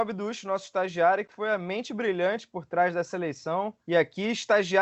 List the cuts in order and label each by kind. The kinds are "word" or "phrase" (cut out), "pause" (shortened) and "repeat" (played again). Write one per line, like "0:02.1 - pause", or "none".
0:03.8 - pause